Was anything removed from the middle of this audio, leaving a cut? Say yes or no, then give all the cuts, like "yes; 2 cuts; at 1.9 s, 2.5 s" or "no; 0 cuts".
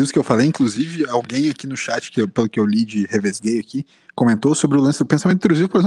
no; 0 cuts